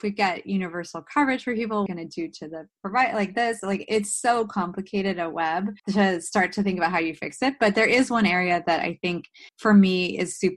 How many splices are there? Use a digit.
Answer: 3